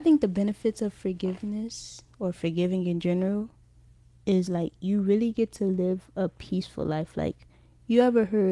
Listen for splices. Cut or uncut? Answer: uncut